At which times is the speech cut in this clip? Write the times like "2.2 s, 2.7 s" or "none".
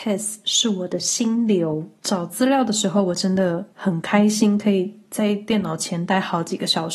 2.0 s, 3.7 s